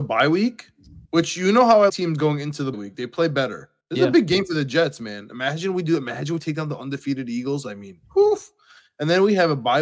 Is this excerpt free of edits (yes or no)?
no